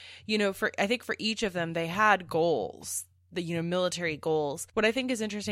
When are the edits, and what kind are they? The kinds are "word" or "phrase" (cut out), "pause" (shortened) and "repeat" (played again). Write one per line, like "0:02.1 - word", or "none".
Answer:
none

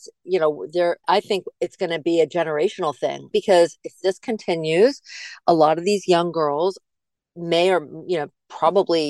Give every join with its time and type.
0:01.0 - word
0:03.3 - word

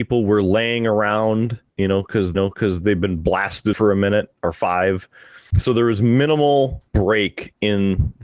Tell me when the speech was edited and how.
0:01.7 - pause
0:02.3 - repeat
0:03.7 - phrase
0:05.5 - pause
0:06.9 - pause

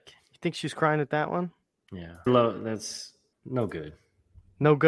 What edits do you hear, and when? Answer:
0:02.3 - word
0:03.3 - pause

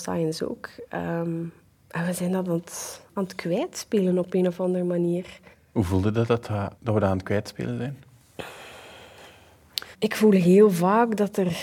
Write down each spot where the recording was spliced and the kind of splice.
0:01.7 - pause
0:05.5 - pause
0:06.7 - pause
0:09.9 - pause

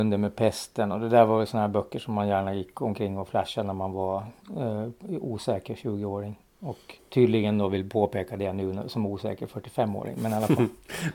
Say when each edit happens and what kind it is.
0:07.0 - pause

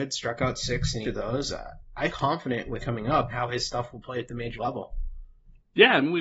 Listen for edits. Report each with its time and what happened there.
0:01.0 - word
0:02.1 - word
0:02.8 - word
0:03.3 - word
0:04.6 - word

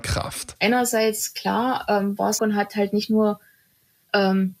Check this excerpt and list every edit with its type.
0:02.4 - phrase

